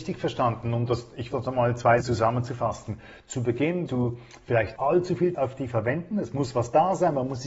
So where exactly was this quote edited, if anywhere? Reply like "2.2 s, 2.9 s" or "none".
1.3 s, 2.0 s, 3.9 s, 4.8 s, 5.3 s, 5.7 s